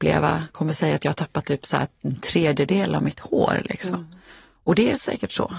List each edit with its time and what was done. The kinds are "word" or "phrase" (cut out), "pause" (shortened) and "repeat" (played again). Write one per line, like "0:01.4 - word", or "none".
none